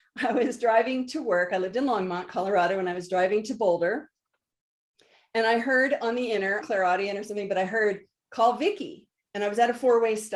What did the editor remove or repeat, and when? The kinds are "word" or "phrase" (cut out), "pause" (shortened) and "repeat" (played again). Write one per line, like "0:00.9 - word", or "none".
0:06.6 - phrase